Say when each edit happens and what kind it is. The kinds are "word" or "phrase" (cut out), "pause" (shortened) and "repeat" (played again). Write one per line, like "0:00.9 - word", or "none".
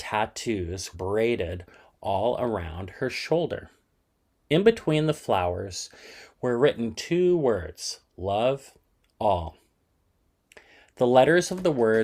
0:00.9 - word